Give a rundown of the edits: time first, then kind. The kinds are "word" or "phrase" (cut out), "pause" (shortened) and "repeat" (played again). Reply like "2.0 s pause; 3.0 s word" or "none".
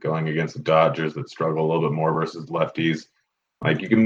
none